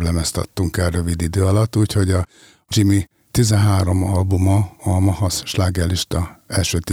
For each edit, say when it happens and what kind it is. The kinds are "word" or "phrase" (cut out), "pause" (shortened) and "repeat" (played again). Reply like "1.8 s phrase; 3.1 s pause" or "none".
none